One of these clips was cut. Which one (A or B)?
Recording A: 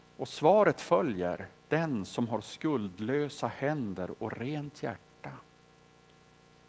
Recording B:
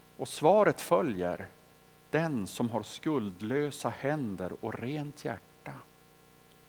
A